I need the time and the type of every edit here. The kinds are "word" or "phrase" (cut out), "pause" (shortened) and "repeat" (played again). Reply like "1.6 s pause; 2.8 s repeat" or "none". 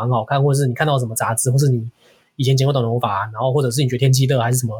none